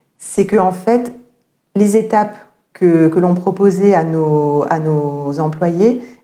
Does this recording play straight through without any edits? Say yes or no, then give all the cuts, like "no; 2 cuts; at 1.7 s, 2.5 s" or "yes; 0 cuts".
yes; 0 cuts